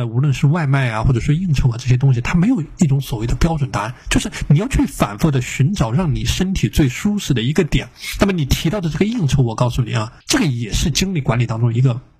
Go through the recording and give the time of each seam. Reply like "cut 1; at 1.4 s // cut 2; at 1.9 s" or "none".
cut 1; at 10.2 s